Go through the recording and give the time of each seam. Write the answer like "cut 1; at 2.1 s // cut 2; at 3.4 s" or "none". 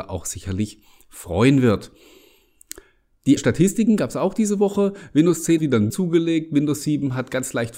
cut 1; at 3.4 s // cut 2; at 5.6 s // cut 3; at 5.9 s